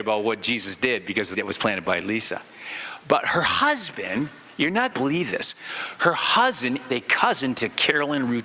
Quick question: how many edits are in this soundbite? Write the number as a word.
three